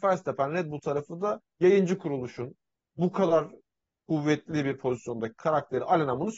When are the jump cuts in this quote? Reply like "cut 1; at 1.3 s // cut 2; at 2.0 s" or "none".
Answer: none